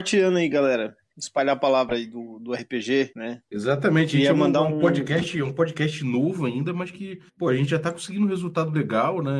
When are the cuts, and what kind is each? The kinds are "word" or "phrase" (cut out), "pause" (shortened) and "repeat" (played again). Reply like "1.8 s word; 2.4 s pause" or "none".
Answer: 7.3 s pause